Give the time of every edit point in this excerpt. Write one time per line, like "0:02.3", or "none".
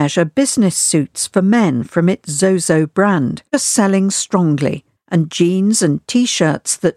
0:05.0